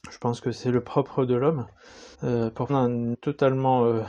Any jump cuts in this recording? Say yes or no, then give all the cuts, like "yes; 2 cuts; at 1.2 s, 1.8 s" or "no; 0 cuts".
yes; 3 cuts; at 2.1 s, 2.7 s, 3.1 s